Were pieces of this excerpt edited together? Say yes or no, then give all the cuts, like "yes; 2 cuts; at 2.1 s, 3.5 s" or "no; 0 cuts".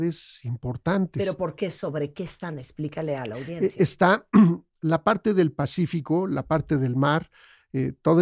no; 0 cuts